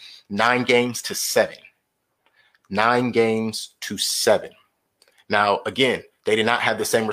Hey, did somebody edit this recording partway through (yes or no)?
no